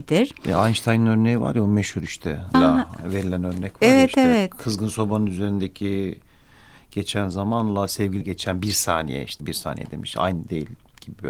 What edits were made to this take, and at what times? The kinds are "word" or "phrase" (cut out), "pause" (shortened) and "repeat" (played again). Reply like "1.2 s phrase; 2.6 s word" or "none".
2.5 s word; 8.2 s word; 9.4 s word